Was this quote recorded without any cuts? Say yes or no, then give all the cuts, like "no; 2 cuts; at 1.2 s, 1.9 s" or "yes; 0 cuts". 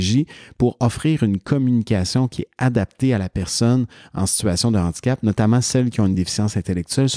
yes; 0 cuts